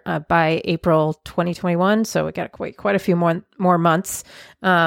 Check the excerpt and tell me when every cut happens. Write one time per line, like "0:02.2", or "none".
none

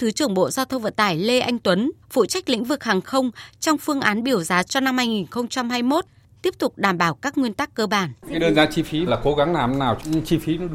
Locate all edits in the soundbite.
0:02.0
0:04.7
0:08.2
0:09.1

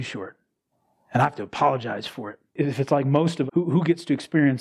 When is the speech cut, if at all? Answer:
0:02.5
0:03.5

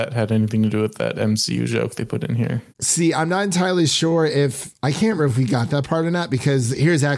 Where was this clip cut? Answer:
0:02.7
0:05.2

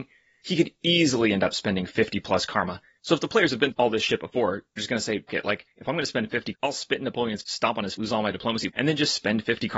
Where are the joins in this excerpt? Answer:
0:03.7
0:04.8
0:05.3
0:06.5
0:07.4
0:08.0
0:08.7

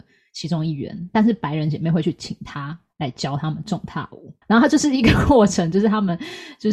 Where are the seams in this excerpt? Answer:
0:04.4

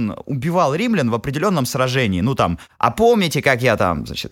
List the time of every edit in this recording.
none

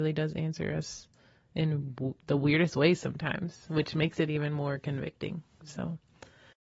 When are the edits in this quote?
none

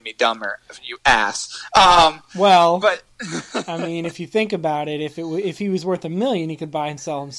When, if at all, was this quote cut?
none

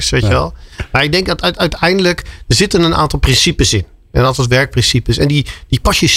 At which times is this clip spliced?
none

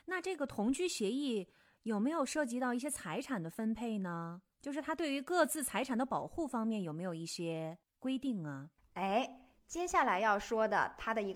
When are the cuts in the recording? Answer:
none

